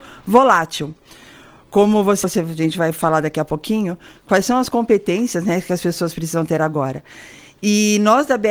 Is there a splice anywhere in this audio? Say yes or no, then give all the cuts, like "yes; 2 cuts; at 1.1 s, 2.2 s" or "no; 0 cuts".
yes; 1 cut; at 2.2 s